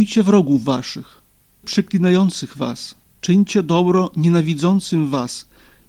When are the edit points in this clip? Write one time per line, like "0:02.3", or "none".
0:01.6
0:03.1